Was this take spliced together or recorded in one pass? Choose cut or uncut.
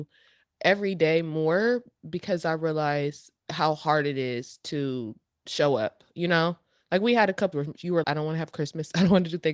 cut